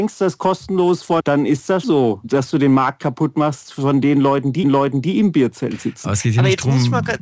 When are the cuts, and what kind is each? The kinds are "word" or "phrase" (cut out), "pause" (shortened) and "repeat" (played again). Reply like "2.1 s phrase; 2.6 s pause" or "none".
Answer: 1.2 s phrase; 1.8 s word; 4.6 s repeat